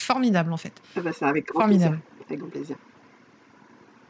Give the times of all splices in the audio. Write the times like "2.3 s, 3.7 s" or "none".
2.4 s